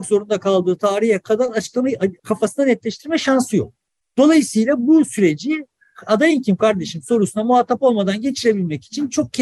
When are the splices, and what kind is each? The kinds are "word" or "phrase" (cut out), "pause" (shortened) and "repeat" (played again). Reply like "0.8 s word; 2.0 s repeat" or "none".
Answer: 2.2 s pause